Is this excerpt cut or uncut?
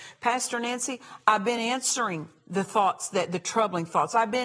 uncut